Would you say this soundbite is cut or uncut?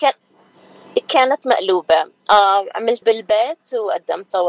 cut